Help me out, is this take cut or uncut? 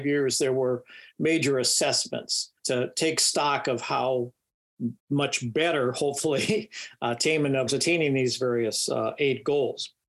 cut